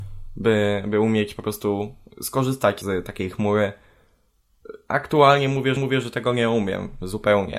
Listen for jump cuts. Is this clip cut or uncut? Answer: cut